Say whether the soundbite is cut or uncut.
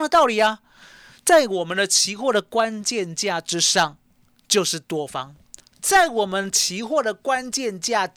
uncut